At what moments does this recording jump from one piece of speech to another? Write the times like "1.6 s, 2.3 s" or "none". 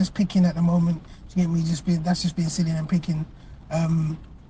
none